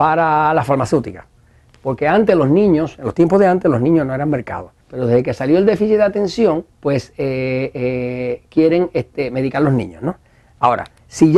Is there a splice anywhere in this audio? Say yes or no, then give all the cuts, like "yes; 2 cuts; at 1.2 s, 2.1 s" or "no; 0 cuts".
yes; 2 cuts; at 4.8 s, 6.7 s